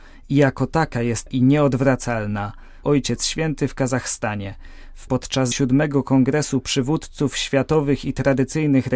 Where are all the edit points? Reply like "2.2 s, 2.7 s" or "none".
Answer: 1.3 s, 2.8 s, 5.1 s, 5.5 s